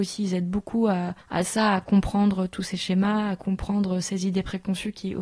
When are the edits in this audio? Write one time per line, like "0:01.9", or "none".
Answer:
0:01.2

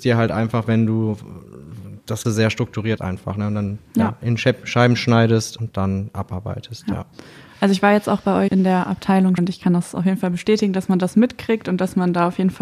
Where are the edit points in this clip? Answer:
0:02.2
0:03.0
0:05.6
0:08.5
0:09.4

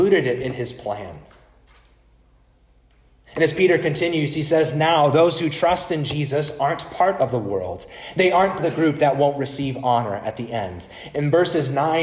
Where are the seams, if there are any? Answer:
0:08.6

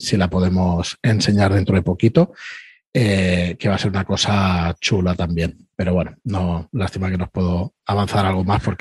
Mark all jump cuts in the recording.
0:05.7

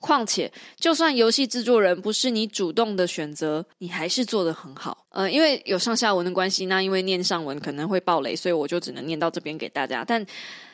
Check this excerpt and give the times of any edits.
0:03.7

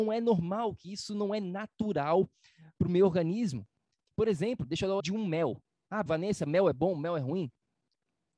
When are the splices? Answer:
0:05.0
0:06.1

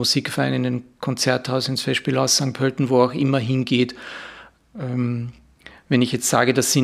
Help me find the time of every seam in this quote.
none

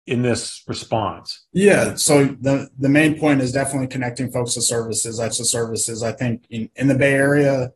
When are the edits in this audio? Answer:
0:05.3

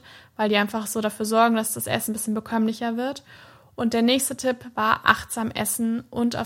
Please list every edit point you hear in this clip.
none

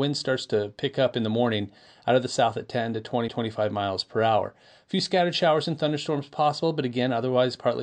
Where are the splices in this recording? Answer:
0:03.3

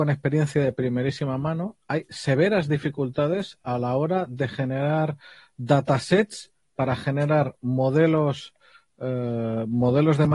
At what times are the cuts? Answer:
none

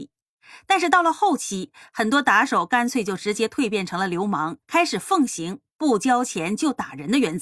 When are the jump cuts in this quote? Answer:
0:04.6

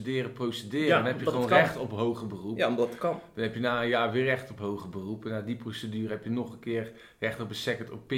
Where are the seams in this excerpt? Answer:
none

